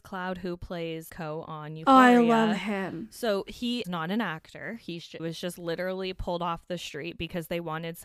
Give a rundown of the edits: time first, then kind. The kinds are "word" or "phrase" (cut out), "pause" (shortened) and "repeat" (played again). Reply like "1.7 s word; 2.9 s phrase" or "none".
1.1 s word; 3.8 s word; 5.2 s word